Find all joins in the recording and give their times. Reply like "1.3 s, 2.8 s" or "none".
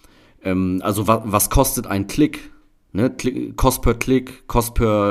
none